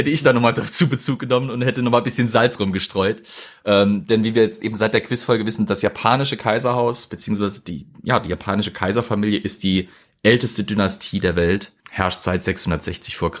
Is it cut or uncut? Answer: cut